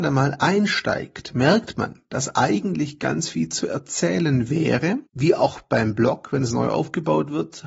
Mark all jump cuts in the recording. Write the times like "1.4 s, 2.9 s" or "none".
5.1 s